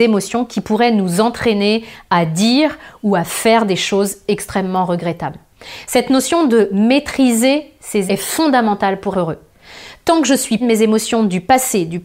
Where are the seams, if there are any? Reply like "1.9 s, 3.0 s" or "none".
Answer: 8.1 s, 9.1 s, 10.6 s